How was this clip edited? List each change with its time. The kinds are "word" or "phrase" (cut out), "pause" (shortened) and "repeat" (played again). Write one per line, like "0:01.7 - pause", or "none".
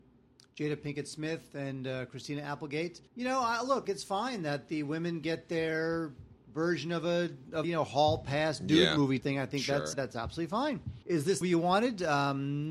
0:03.1 - pause
0:03.8 - phrase
0:07.6 - word
0:09.2 - word
0:09.9 - word
0:11.0 - pause
0:11.4 - word